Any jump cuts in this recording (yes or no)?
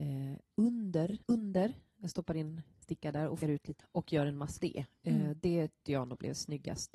yes